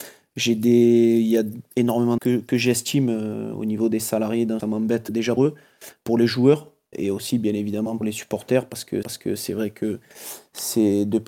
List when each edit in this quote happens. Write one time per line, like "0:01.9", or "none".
0:02.2
0:04.6
0:05.4
0:06.9
0:08.0
0:09.0